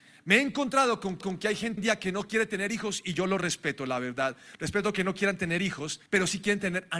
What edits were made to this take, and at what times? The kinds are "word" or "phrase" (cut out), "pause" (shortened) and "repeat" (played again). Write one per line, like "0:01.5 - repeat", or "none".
0:01.2 - repeat
0:01.8 - word
0:06.1 - pause